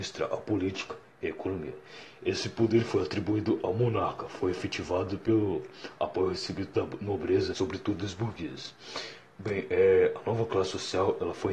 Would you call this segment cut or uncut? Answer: cut